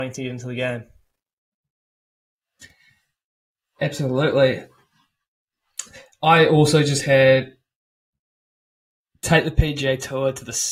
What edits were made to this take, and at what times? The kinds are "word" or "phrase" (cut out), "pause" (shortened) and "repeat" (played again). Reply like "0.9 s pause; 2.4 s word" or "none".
none